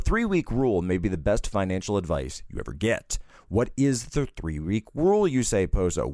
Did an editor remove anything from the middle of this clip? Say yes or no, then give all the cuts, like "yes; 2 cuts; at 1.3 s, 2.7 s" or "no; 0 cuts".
no; 0 cuts